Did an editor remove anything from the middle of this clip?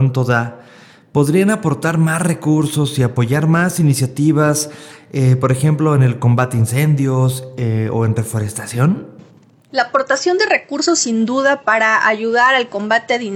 no; 0 cuts

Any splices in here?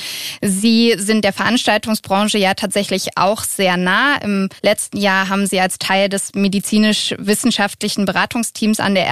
yes; 1 cut; at 4.6 s

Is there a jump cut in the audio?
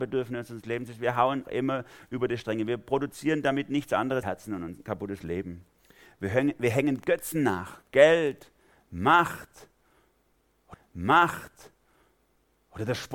yes; 3 cuts; at 1.4 s, 4.2 s, 10.7 s

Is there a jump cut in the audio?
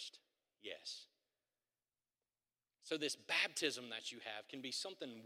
no; 0 cuts

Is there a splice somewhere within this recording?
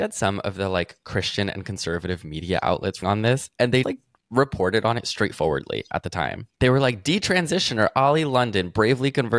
yes; 3 cuts; at 3.0 s, 3.8 s, 6.5 s

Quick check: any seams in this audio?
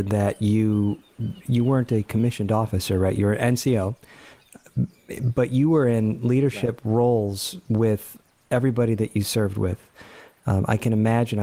no; 0 cuts

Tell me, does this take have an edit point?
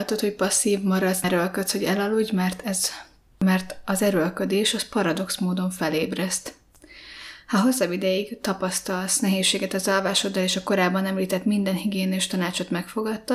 yes; 1 cut; at 1.2 s

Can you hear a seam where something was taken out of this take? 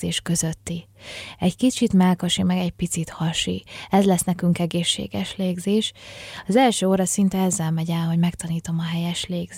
no; 0 cuts

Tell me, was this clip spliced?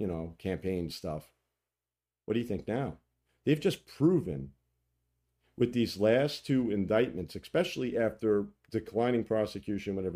no; 0 cuts

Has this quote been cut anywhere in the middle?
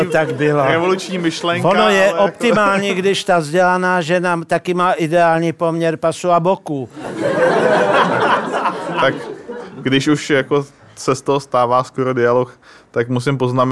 no; 0 cuts

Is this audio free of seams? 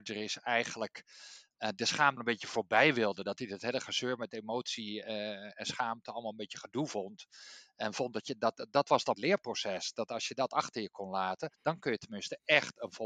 no; 3 cuts; at 2.2 s, 9.1 s, 11.5 s

